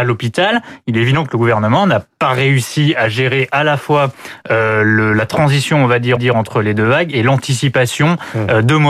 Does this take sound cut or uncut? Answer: cut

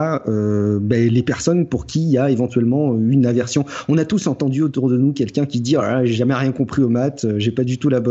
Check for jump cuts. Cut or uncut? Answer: uncut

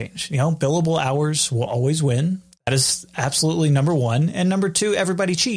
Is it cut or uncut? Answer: uncut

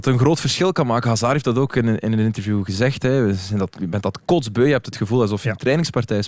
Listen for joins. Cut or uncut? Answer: uncut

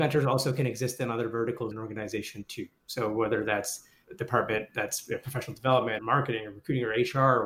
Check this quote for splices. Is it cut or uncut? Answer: cut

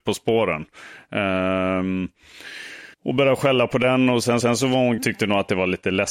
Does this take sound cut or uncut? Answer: cut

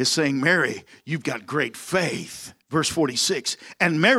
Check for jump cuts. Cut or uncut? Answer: cut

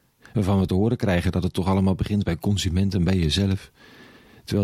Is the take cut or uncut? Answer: uncut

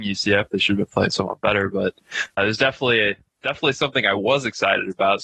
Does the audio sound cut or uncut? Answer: cut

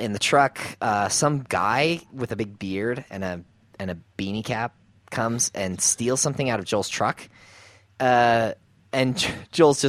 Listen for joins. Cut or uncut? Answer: uncut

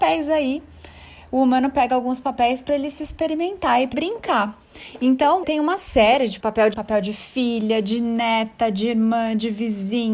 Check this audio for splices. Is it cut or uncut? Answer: cut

